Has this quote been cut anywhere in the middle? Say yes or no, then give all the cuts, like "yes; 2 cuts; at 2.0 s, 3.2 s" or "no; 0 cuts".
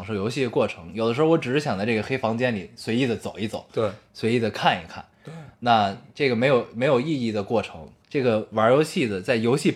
yes; 1 cut; at 8.0 s